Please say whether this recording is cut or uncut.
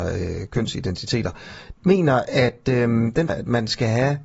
cut